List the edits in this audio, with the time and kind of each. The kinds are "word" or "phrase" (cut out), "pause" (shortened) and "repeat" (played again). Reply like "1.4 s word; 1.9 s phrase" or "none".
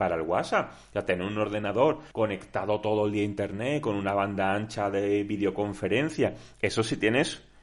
2.1 s pause

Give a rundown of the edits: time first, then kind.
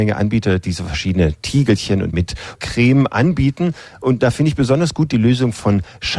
2.1 s word; 2.5 s word

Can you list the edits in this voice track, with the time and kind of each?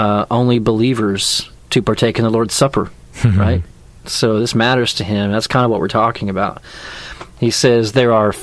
none

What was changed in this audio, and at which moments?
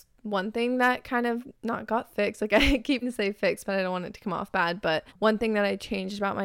1.6 s pause; 3.0 s word; 5.1 s pause

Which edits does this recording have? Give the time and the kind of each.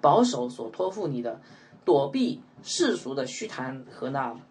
none

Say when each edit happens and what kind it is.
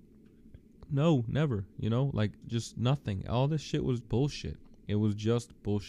2.4 s word; 4.0 s word

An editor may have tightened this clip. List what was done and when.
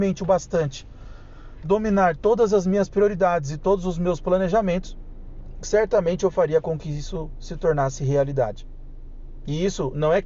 1.6 s word

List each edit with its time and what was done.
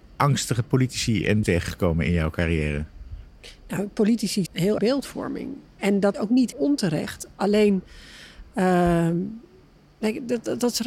1.4 s word; 4.5 s word; 4.8 s phrase; 6.1 s word; 6.5 s word

